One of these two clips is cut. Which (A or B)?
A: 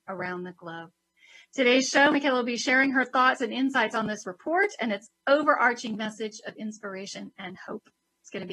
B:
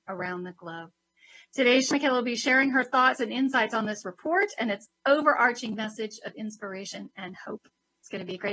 B